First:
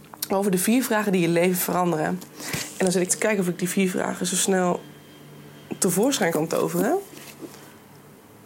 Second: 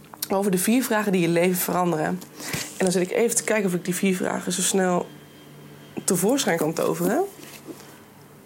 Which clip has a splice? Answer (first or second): first